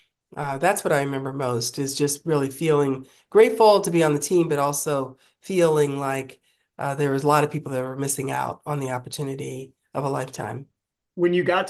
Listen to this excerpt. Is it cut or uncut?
uncut